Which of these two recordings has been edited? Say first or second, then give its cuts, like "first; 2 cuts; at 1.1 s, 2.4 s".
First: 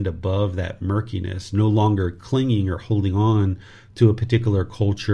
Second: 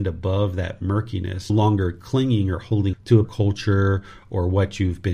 second; 3 cuts; at 1.5 s, 2.9 s, 3.2 s